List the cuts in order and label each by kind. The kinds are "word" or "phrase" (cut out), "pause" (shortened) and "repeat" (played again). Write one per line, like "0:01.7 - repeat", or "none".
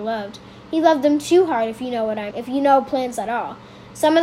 0:02.3 - word

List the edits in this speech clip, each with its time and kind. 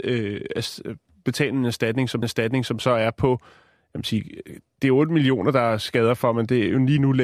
0:02.2 - repeat

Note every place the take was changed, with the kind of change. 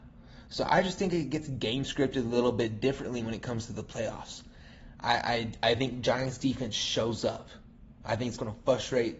none

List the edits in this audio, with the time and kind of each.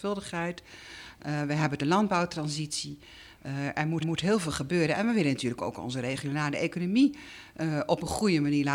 0:01.8 - phrase
0:04.0 - repeat

